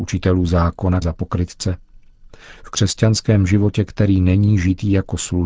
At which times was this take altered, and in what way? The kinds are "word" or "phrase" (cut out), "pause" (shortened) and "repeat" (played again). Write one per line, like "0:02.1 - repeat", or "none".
0:01.0 - phrase

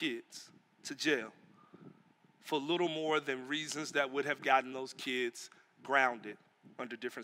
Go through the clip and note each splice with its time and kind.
none

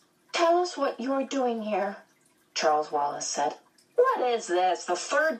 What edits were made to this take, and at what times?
none

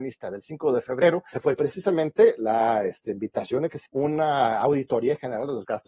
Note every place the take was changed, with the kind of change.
0:01.3 - word
0:03.9 - word

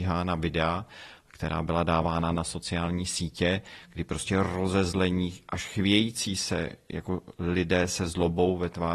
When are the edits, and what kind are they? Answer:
none

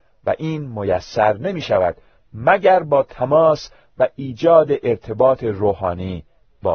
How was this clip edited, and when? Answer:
none

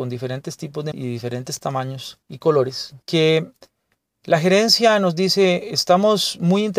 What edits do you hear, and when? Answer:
0:00.9 - word
0:02.2 - pause
0:03.0 - pause

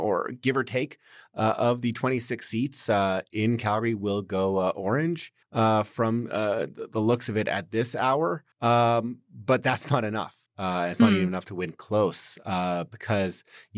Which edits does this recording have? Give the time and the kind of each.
0:05.4 - pause
0:08.5 - pause
0:10.5 - pause

